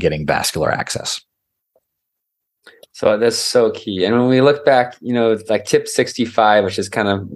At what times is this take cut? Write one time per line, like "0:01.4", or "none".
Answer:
none